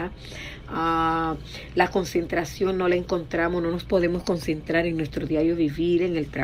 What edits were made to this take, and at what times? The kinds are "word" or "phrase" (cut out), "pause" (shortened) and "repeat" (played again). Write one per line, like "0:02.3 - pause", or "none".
none